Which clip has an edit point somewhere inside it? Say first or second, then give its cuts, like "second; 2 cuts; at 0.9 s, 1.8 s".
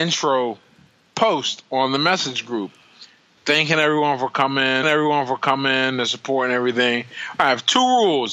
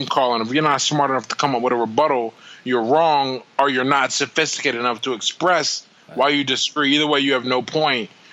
first; 2 cuts; at 3.4 s, 4.8 s